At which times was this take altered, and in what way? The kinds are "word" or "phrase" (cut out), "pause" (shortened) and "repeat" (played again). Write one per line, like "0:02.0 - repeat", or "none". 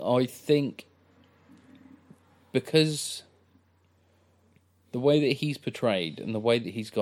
none